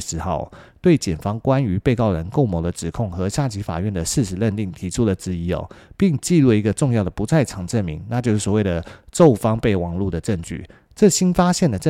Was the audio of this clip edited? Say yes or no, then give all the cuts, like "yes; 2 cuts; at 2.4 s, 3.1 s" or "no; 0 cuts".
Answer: no; 0 cuts